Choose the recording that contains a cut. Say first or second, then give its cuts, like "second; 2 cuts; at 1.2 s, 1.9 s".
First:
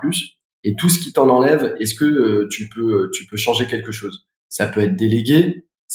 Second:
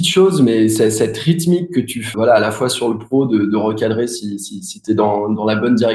second; 1 cut; at 2.1 s